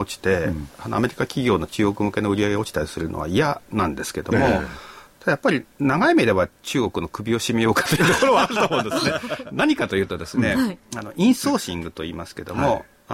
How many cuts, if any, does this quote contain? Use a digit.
1